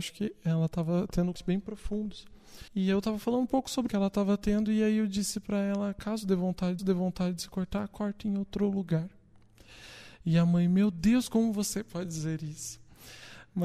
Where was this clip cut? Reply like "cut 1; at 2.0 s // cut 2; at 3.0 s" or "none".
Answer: cut 1; at 1.3 s // cut 2; at 2.7 s // cut 3; at 3.9 s // cut 4; at 6.8 s